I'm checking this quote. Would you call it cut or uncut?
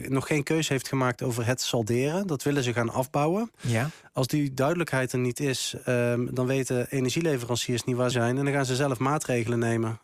cut